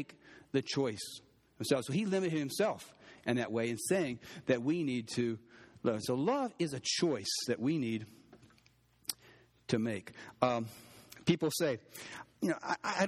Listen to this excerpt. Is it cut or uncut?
uncut